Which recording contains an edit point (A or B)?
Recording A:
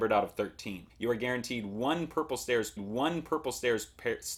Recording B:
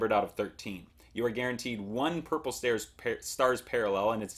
A